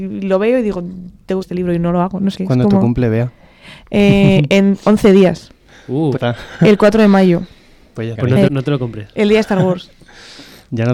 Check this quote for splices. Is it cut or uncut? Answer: cut